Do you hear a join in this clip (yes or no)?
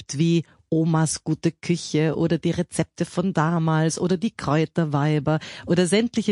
no